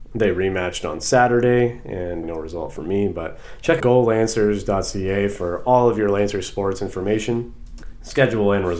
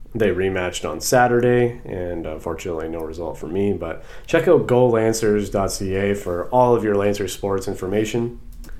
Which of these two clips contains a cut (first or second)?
first